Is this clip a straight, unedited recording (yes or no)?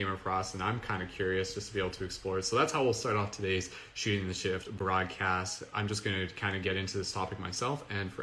yes